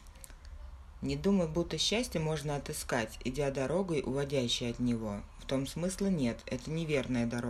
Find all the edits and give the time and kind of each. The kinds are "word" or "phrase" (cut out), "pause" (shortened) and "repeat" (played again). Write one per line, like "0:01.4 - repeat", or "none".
none